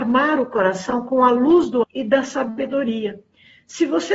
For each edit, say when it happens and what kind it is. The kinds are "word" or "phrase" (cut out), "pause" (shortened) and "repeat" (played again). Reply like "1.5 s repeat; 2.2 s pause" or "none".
1.8 s word